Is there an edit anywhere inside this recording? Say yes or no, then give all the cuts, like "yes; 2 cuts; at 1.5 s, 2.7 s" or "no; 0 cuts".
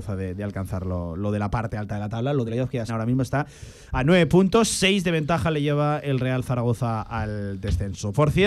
yes; 2 cuts; at 2.5 s, 2.9 s